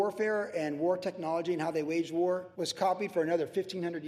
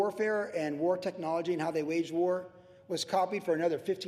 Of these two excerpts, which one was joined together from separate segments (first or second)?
first